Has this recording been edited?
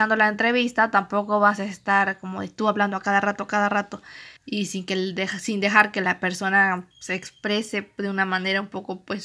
yes; 2 cuts; at 4.4 s, 6.9 s

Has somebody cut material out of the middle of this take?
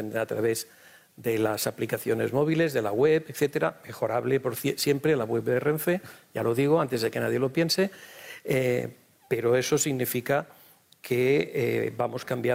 no; 0 cuts

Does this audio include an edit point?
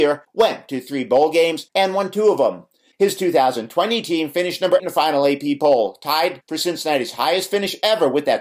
yes; 1 cut; at 4.8 s

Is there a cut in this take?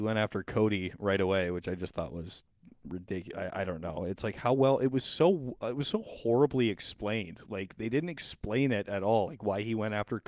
no; 0 cuts

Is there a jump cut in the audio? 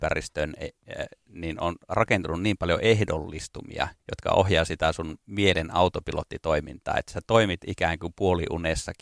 yes; 1 cut; at 4.0 s

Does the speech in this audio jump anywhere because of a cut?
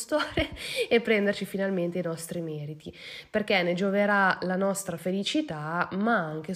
no; 0 cuts

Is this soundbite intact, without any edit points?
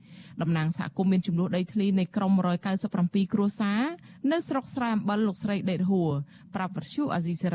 yes; 0 cuts

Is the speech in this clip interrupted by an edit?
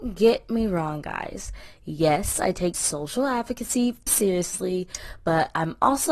yes; 2 cuts; at 2.7 s, 4.1 s

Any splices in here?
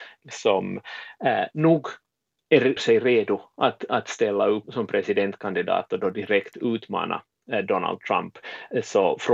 yes; 2 cuts; at 2.8 s, 4.6 s

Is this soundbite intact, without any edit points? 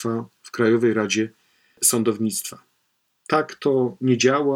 yes; 0 cuts

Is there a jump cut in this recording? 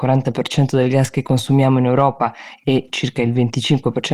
no; 0 cuts

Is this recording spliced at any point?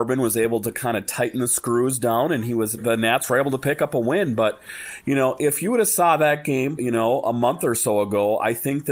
yes; 2 cuts; at 2.8 s, 6.8 s

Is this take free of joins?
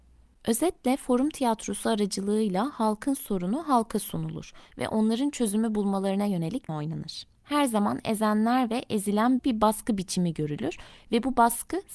no; 3 cuts; at 6.7 s, 7.4 s, 9.4 s

